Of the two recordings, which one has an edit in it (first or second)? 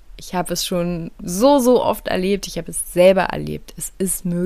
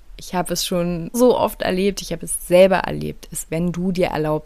second